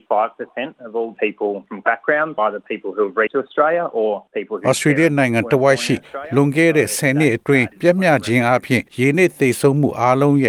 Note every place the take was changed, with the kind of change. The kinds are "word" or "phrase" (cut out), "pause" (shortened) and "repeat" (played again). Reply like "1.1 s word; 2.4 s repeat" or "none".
1.1 s phrase; 1.8 s word; 2.4 s word; 3.3 s phrase; 4.3 s pause; 7.7 s pause; 8.9 s pause